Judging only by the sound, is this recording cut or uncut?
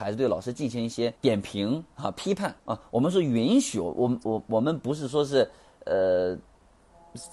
cut